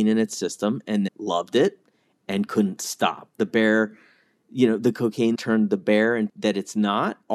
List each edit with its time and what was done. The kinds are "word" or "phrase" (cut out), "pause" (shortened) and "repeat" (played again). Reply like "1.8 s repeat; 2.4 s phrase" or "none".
1.1 s word; 5.3 s word; 6.3 s word